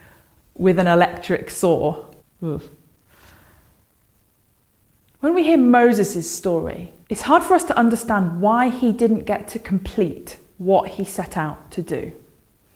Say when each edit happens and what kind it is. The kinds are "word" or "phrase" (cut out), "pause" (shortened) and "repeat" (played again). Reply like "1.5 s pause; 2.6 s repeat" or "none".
2.2 s pause; 7.0 s pause